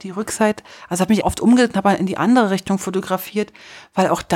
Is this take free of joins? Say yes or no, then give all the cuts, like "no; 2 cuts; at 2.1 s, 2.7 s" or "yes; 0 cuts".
no; 1 cut; at 1.2 s